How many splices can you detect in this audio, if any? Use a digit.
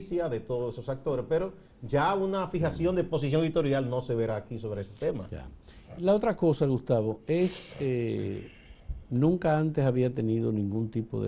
0